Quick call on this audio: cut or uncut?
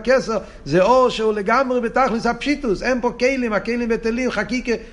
uncut